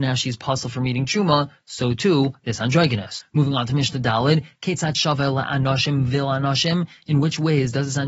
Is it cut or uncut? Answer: uncut